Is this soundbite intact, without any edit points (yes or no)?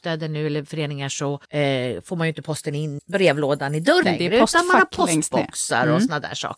no